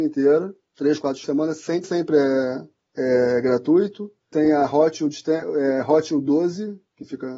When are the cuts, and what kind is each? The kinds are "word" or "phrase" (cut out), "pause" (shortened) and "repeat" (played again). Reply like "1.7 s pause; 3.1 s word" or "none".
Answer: 1.2 s phrase; 1.8 s word; 4.3 s word